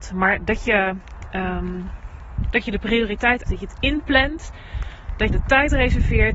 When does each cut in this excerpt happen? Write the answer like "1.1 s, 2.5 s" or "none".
3.5 s, 5.3 s